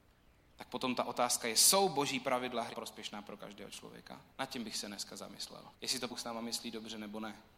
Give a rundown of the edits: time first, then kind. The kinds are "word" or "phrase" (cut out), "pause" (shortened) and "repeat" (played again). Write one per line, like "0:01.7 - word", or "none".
0:02.7 - phrase
0:04.3 - pause
0:05.7 - pause
0:06.1 - word